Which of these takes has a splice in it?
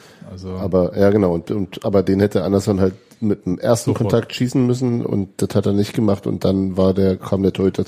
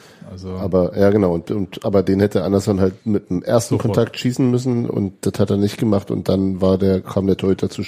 second; 1 cut; at 3.0 s

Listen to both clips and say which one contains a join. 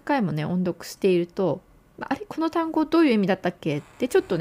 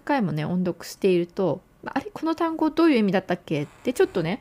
second; 1 cut; at 1.6 s

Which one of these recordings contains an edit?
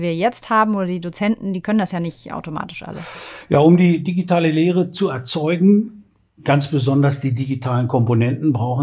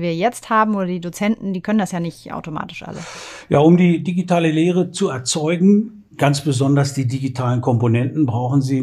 second; 1 cut; at 6.1 s

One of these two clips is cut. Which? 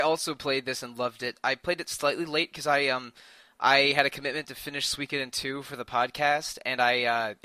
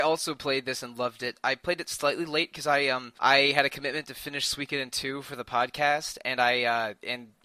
second; 1 cut; at 3.2 s

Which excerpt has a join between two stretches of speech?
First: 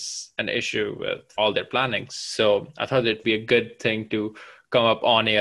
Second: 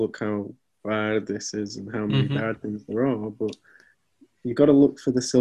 first; 2 cuts; at 1.4 s, 3.2 s

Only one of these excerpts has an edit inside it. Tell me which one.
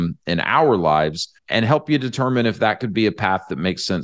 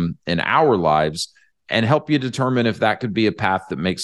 first; 1 cut; at 1.4 s

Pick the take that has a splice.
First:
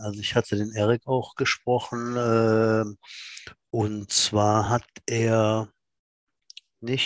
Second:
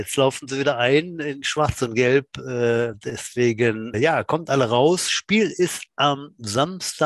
second; 1 cut; at 3.9 s

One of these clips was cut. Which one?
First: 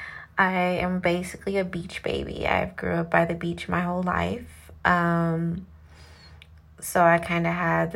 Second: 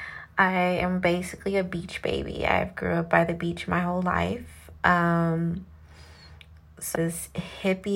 second; 1 cut; at 7.0 s

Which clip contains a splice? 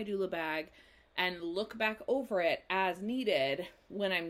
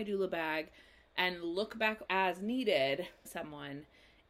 second; 2 cuts; at 2.1 s, 3.2 s

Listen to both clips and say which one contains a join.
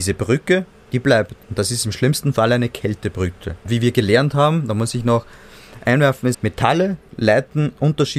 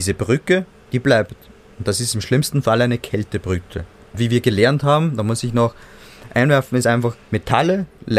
first; 3 cuts; at 1.4 s, 3.6 s, 6.3 s

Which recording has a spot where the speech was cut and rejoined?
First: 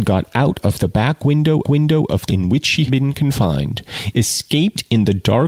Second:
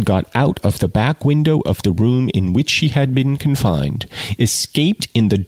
first; 3 cuts; at 1.6 s, 2.3 s, 2.9 s

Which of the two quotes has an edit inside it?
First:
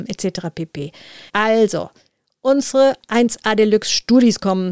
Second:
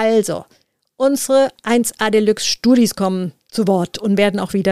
first; 1 cut; at 1.3 s

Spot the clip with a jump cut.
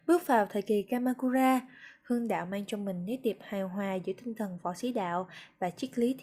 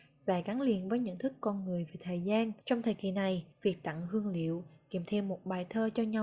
second; 2 cuts; at 2.6 s, 3.5 s

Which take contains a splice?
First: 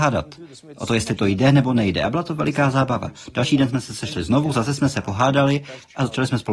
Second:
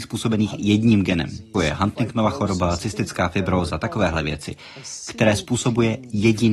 second; 1 cut; at 1.5 s

